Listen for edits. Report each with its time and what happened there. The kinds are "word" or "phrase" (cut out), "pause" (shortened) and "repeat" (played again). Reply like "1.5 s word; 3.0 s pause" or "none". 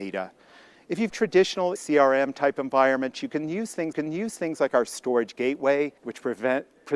1.1 s word; 1.8 s word; 3.9 s repeat; 6.0 s pause